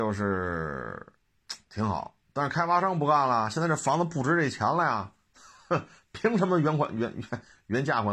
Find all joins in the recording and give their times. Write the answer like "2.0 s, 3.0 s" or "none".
1.6 s